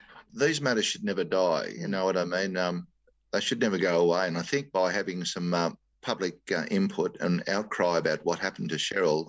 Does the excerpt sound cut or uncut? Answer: uncut